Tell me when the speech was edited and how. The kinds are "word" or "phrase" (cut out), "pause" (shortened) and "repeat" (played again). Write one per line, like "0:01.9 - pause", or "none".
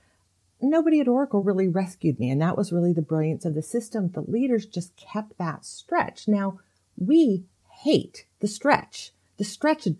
0:08.3 - pause